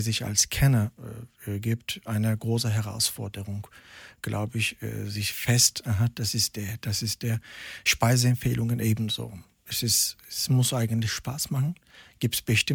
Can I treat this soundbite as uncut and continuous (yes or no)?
yes